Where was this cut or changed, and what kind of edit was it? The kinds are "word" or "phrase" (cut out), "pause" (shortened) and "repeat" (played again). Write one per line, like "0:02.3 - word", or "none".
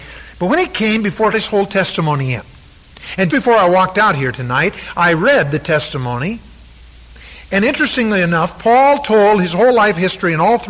0:01.3 - phrase
0:03.3 - word